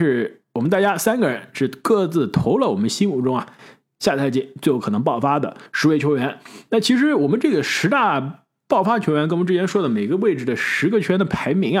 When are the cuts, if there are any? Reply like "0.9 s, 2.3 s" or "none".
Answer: 5.7 s